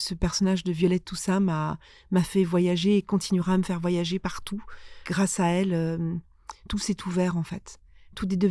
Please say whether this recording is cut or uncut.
uncut